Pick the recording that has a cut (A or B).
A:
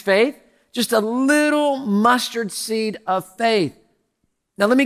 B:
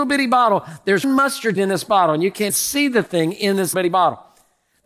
B